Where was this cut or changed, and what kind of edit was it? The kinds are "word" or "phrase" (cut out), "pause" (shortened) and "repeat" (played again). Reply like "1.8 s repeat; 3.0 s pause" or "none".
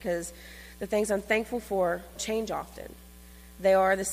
2.2 s word